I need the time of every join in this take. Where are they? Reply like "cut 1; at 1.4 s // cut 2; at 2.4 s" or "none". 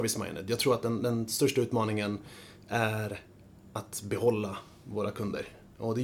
none